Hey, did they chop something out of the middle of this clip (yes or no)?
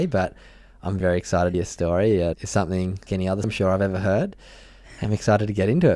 yes